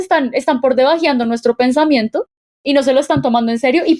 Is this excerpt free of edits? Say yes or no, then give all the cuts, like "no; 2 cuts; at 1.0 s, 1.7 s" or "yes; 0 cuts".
yes; 0 cuts